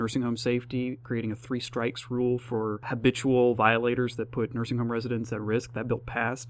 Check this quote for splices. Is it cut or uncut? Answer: uncut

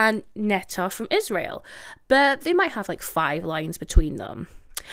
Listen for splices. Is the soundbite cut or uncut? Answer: uncut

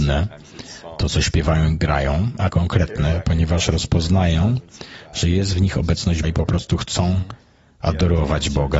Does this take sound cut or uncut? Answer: cut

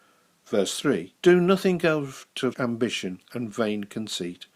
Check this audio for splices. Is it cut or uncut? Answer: cut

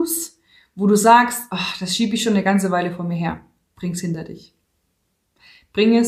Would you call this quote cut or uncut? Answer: uncut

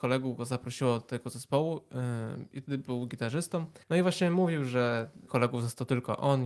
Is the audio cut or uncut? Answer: cut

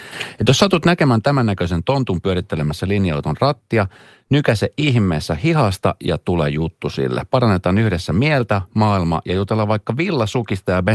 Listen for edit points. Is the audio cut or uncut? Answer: uncut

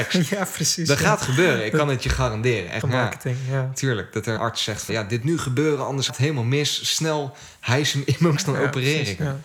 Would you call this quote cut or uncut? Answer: cut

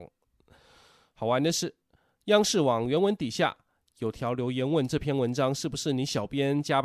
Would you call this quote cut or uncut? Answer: uncut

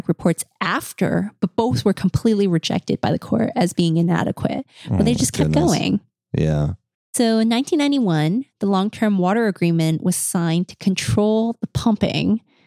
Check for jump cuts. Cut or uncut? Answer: uncut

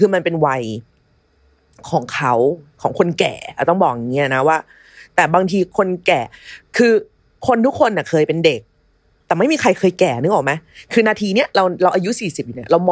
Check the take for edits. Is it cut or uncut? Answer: uncut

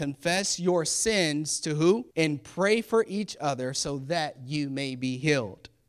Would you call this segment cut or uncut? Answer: cut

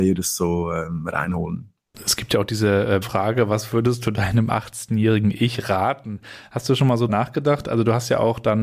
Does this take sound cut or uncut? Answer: cut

